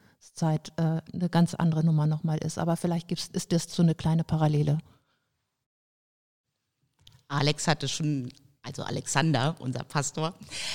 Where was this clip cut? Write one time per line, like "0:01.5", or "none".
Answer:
none